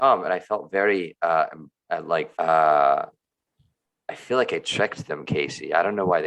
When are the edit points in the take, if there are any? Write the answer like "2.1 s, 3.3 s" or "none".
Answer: 2.3 s